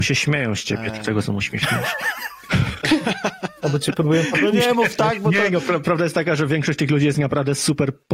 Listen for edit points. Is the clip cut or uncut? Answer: uncut